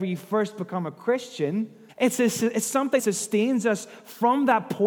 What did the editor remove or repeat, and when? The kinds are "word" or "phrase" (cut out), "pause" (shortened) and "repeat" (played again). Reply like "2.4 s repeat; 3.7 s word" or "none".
1.9 s pause; 3.0 s word